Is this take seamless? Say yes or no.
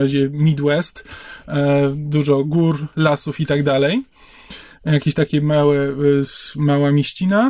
yes